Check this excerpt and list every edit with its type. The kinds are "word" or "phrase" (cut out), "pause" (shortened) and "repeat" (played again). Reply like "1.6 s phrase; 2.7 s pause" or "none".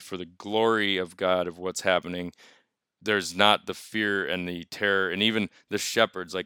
none